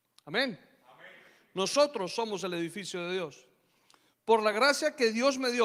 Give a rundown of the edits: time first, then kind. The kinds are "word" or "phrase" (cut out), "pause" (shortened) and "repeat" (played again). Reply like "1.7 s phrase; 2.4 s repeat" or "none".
none